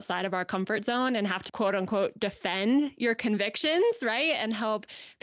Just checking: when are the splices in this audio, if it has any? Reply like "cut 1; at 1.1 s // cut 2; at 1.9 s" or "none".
cut 1; at 1.5 s